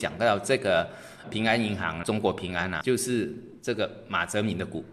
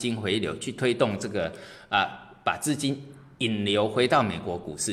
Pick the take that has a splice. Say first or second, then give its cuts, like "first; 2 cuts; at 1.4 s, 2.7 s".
first; 3 cuts; at 1.2 s, 2.0 s, 2.8 s